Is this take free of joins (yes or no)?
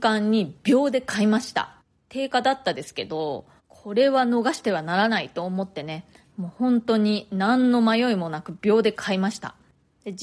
no